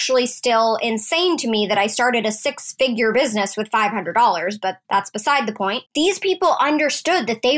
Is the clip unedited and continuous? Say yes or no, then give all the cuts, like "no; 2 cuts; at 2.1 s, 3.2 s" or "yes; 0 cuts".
no; 2 cuts; at 4.8 s, 5.9 s